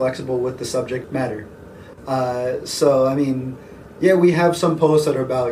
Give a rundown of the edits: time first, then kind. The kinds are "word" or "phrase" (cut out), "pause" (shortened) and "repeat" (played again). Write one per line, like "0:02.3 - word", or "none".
none